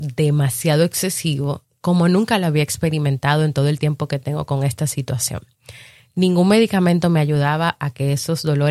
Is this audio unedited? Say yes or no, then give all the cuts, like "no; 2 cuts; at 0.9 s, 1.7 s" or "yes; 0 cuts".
yes; 0 cuts